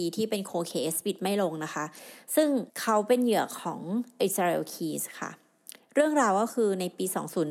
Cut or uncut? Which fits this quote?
cut